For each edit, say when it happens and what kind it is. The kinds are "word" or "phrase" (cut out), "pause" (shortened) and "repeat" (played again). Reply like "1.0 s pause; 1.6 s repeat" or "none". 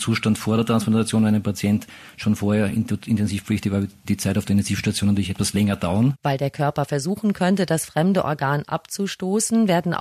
4.0 s word; 6.2 s pause